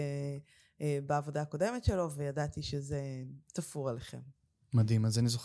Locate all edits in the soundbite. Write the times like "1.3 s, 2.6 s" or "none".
3.4 s, 4.3 s